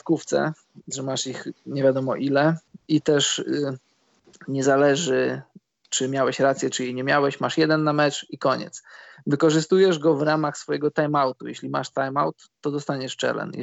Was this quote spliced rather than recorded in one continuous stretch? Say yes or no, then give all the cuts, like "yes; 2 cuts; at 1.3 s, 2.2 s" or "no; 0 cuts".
no; 0 cuts